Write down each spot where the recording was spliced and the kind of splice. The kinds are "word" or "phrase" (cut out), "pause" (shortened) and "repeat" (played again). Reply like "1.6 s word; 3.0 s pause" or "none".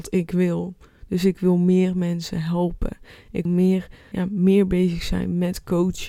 3.5 s word; 4.1 s word